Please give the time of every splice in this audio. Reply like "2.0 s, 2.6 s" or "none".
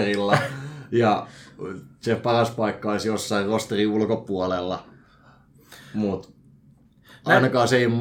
none